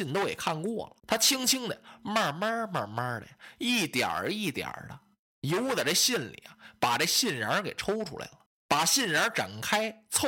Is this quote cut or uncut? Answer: cut